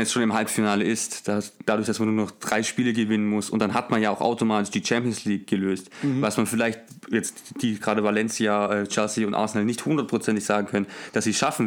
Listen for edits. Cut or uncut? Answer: uncut